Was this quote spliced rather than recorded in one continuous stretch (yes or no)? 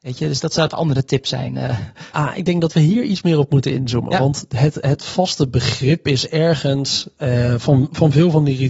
no